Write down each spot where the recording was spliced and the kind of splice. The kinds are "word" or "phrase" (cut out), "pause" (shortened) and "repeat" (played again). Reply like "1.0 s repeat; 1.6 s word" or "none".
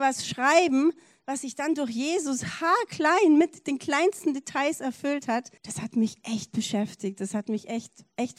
5.6 s pause